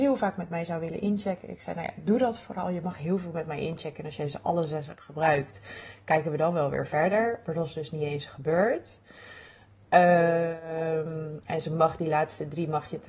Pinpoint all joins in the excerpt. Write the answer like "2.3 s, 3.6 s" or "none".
none